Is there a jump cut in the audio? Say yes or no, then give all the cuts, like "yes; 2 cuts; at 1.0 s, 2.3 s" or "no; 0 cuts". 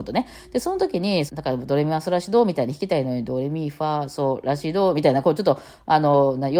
yes; 1 cut; at 1.3 s